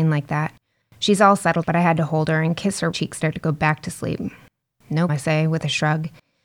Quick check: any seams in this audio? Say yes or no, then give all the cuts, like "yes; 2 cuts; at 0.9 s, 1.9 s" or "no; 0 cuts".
yes; 4 cuts; at 1.6 s, 2.9 s, 3.2 s, 5.1 s